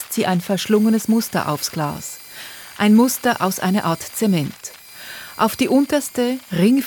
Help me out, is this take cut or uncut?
uncut